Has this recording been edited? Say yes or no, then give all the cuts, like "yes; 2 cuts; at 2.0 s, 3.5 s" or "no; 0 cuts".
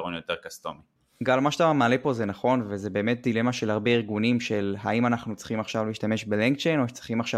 no; 0 cuts